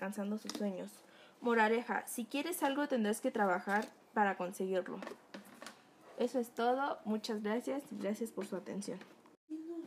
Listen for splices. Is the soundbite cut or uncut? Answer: uncut